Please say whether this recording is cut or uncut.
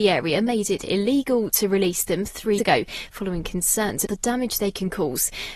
cut